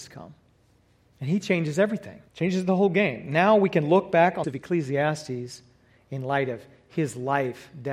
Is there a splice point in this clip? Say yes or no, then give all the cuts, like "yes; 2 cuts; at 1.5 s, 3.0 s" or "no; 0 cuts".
yes; 2 cuts; at 2.3 s, 4.4 s